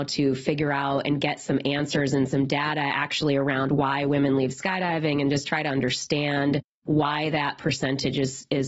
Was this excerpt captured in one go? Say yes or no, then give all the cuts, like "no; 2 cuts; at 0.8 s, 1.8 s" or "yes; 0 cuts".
yes; 0 cuts